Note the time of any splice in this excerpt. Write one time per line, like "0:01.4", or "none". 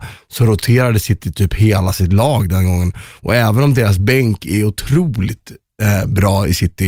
none